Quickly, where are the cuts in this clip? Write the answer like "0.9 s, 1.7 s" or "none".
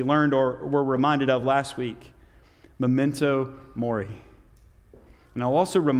none